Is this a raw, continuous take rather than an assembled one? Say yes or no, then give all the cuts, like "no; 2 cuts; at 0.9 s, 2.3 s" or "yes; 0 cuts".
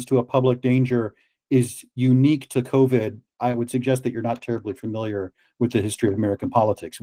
yes; 0 cuts